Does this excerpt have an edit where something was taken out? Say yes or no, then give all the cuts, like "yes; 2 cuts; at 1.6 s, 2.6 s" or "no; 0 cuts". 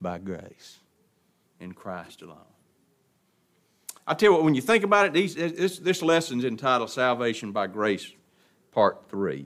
no; 0 cuts